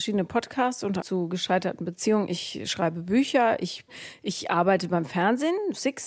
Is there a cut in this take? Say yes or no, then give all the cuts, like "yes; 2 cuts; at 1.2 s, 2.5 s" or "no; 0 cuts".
yes; 1 cut; at 1.0 s